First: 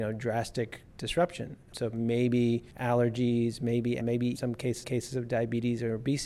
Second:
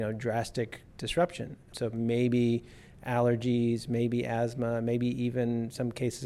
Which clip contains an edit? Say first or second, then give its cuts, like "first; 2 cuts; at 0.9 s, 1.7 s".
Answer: first; 4 cuts; at 2.7 s, 4.0 s, 4.3 s, 4.8 s